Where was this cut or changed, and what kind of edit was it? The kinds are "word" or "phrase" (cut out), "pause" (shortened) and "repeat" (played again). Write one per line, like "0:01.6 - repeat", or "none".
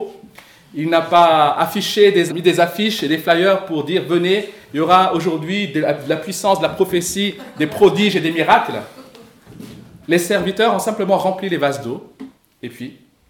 0:02.3 - word
0:10.0 - pause